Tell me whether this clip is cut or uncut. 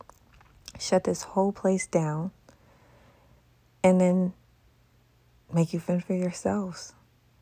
uncut